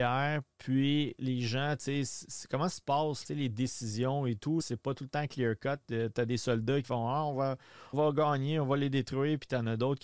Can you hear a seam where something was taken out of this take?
yes; 6 cuts; at 1.2 s, 2.7 s, 3.2 s, 4.6 s, 6.8 s, 7.9 s

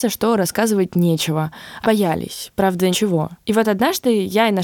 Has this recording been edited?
yes; 3 cuts; at 1.8 s, 2.9 s, 3.4 s

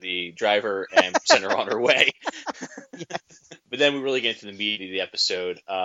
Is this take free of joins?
yes; 0 cuts

